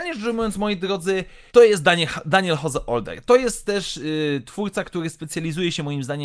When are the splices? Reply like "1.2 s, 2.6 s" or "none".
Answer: 1.5 s